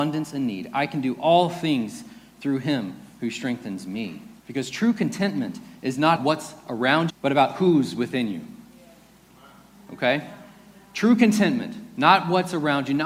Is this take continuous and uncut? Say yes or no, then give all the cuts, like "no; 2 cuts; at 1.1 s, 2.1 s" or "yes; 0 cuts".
no; 3 cuts; at 4.4 s, 6.2 s, 7.1 s